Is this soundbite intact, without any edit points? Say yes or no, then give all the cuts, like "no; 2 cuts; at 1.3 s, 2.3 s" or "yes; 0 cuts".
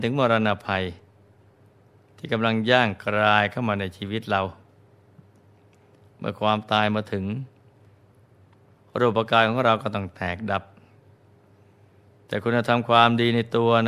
yes; 0 cuts